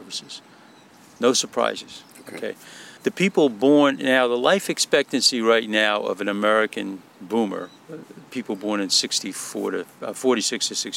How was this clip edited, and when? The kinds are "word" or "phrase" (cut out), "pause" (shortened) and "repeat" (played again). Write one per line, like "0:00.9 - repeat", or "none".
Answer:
0:03.0 - pause